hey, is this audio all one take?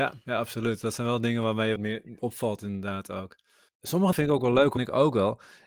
no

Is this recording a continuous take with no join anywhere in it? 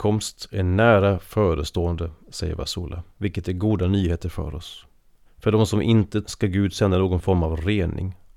no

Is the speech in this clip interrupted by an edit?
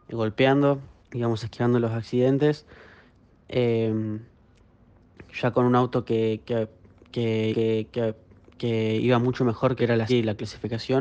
yes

